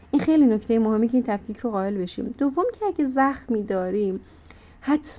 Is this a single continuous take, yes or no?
yes